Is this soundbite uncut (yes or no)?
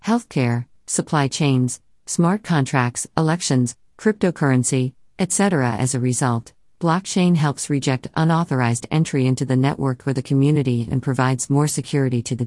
yes